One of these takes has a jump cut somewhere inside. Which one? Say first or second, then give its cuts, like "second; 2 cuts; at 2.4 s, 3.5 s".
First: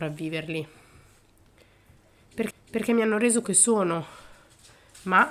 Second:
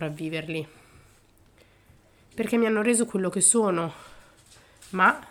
first; 2 cuts; at 2.5 s, 3.4 s